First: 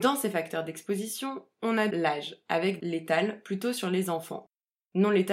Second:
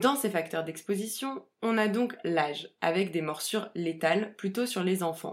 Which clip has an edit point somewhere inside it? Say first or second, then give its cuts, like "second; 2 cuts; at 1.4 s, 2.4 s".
first; 2 cuts; at 1.9 s, 2.8 s